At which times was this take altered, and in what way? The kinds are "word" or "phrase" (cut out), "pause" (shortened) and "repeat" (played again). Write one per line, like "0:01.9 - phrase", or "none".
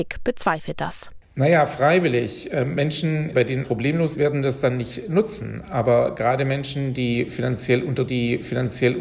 0:03.6 - word
0:04.1 - word
0:08.1 - repeat